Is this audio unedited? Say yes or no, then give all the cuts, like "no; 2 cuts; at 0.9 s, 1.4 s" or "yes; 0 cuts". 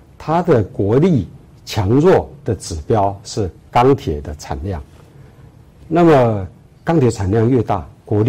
yes; 0 cuts